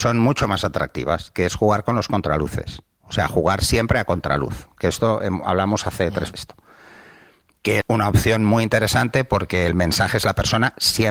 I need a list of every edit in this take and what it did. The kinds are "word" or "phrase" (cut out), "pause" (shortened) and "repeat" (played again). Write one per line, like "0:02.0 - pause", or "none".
0:06.3 - word
0:07.8 - word